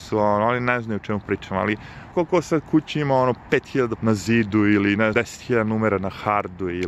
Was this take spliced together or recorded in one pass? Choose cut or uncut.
cut